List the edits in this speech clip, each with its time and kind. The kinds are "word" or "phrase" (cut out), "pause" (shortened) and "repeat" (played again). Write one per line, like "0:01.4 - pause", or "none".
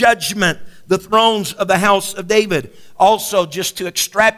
none